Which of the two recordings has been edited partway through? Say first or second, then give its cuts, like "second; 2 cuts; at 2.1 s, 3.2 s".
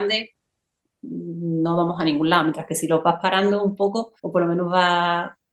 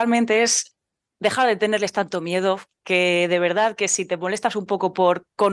first; 1 cut; at 4.2 s